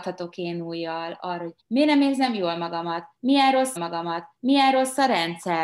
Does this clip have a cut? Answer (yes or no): yes